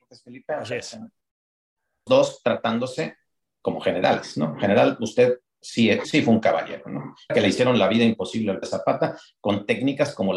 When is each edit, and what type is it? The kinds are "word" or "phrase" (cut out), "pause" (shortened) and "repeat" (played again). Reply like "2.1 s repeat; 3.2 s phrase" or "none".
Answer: 2.1 s word; 6.0 s word; 7.3 s word; 8.6 s word

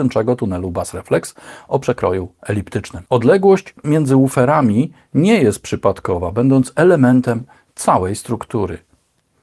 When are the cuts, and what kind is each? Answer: 3.1 s pause

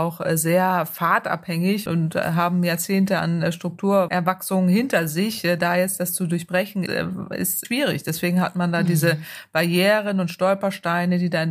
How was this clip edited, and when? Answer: 6.9 s word; 7.6 s word

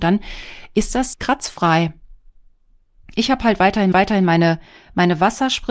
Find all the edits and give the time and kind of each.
1.1 s word; 3.9 s repeat

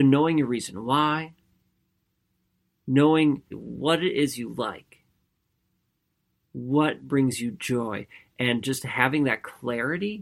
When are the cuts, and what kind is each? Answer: 3.5 s word

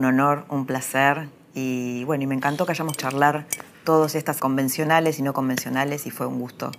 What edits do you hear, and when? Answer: 3.0 s word; 4.4 s word

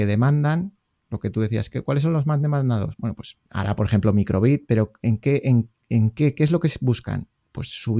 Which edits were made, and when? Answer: none

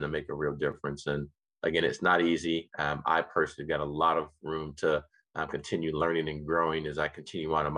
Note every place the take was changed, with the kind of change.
none

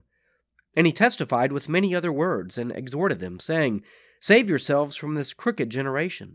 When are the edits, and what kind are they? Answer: none

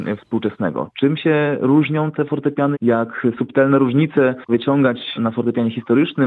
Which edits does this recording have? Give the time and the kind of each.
2.7 s word; 4.5 s word; 5.2 s word

